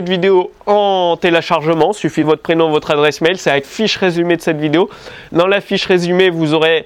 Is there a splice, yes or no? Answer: yes